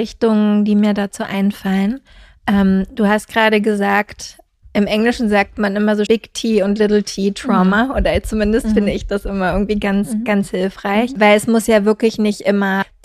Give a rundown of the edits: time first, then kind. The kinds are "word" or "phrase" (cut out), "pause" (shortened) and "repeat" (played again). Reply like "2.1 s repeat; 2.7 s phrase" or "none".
4.6 s pause; 6.1 s word